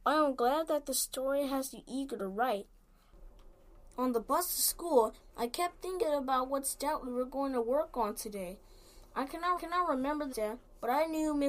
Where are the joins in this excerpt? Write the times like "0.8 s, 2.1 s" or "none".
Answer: 9.6 s, 10.3 s